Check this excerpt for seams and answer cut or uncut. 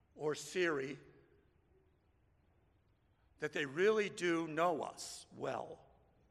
uncut